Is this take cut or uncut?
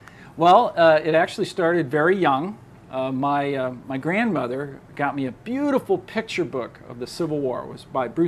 uncut